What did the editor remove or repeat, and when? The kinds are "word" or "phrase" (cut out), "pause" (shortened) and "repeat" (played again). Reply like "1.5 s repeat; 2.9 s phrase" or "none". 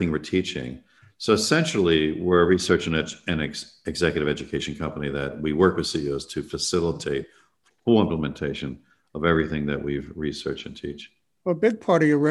none